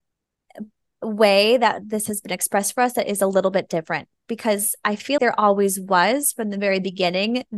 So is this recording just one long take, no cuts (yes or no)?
no